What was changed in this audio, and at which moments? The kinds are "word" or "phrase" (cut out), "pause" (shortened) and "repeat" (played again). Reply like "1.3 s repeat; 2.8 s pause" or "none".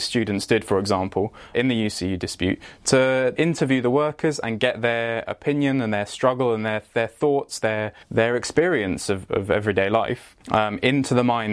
1.5 s word; 3.4 s word; 8.0 s pause; 10.4 s pause